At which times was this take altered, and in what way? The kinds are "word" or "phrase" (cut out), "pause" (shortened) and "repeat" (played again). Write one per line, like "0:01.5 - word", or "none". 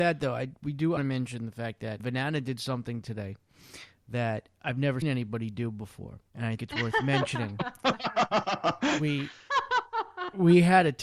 0:01.0 - phrase
0:02.0 - word
0:05.0 - word
0:06.3 - pause
0:06.6 - word